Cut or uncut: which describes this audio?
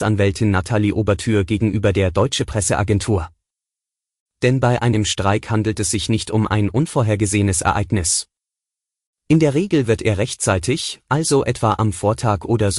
uncut